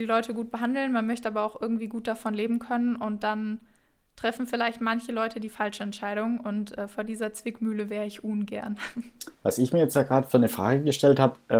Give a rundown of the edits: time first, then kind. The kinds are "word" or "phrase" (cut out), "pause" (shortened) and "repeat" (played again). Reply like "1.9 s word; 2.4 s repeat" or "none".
9.3 s pause